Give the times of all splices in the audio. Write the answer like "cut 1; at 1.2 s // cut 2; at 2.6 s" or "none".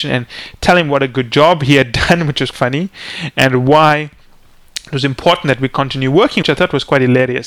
cut 1; at 2.5 s // cut 2; at 6.4 s